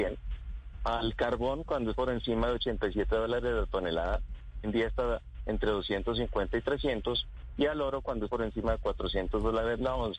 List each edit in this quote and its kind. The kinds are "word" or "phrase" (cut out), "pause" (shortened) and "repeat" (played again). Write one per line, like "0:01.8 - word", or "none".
0:01.9 - word
0:04.6 - word
0:08.3 - word

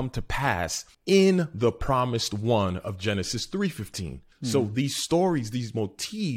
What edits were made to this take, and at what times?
0:00.9 - pause
0:04.3 - pause

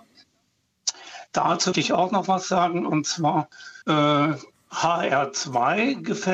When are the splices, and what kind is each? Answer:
0:01.7 - word
0:03.8 - pause

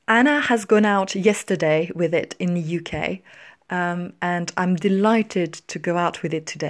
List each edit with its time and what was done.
none

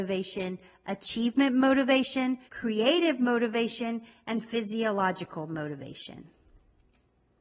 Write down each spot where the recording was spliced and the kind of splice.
0:02.5 - pause

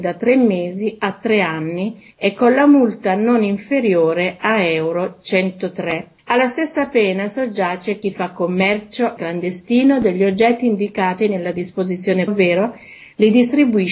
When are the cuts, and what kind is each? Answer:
0:02.1 - pause
0:06.2 - pause
0:09.2 - phrase
0:12.3 - word

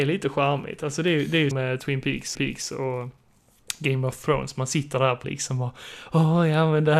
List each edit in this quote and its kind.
0:01.5 - word
0:02.3 - repeat
0:05.2 - word

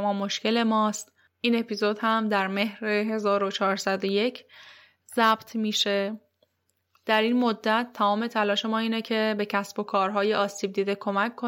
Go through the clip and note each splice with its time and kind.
none

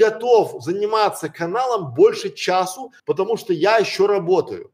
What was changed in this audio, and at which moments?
0:03.0 - pause

